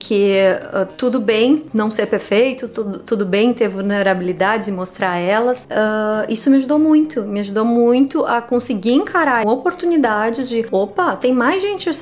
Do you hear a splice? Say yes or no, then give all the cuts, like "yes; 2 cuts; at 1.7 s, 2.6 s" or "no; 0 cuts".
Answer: yes; 1 cut; at 9.4 s